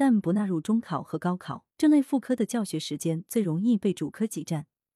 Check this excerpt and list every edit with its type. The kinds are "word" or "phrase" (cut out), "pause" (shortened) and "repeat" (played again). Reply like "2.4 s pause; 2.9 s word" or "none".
1.7 s pause

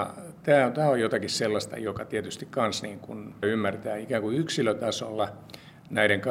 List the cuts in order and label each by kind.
3.4 s word

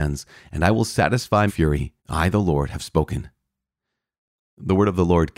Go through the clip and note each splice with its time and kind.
1.5 s word; 2.0 s pause

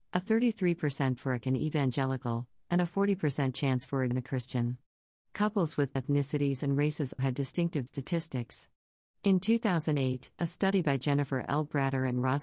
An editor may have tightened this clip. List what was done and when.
1.4 s word; 4.1 s word; 6.0 s word; 7.2 s word; 7.9 s word

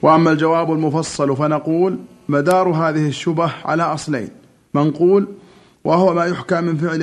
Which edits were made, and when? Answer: none

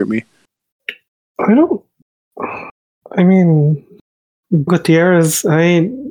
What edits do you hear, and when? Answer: 4.7 s word

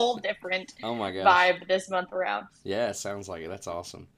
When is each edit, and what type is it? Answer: 2.5 s pause

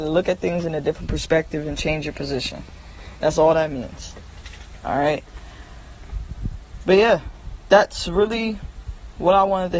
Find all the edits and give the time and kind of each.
none

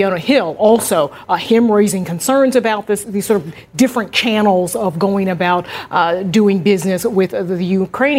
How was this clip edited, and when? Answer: 3.0 s word

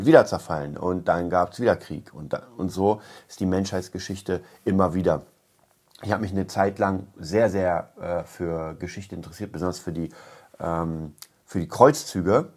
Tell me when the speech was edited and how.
none

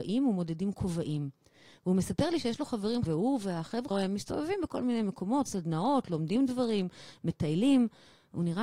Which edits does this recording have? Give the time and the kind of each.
3.0 s word; 3.9 s word; 5.5 s word

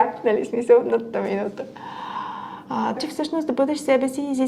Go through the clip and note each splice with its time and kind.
1.1 s word; 3.0 s word

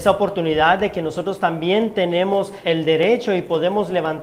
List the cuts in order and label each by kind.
2.6 s word

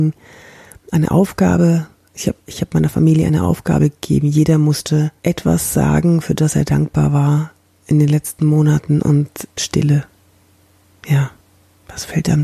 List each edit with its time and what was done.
5.2 s pause; 9.6 s phrase

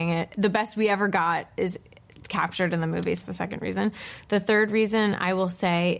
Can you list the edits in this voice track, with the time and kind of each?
3.2 s word

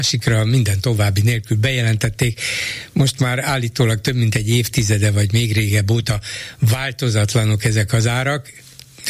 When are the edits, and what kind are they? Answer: none

